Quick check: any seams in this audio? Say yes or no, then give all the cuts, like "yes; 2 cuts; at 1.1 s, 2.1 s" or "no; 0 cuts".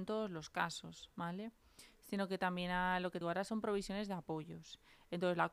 yes; 1 cut; at 3.2 s